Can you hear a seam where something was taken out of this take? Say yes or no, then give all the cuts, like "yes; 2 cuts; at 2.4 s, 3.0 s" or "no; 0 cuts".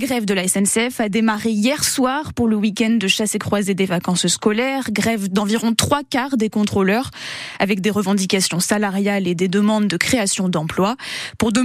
no; 0 cuts